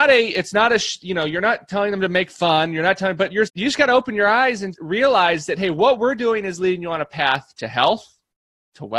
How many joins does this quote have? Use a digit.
2